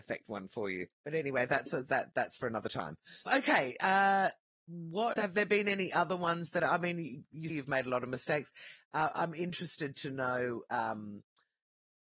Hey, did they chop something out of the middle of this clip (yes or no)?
yes